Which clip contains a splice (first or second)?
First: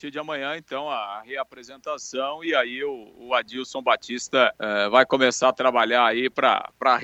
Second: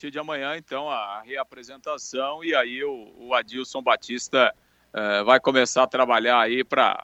first